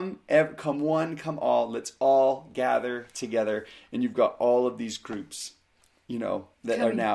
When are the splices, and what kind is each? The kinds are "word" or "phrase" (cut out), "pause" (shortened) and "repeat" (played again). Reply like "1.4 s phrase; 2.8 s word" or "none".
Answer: none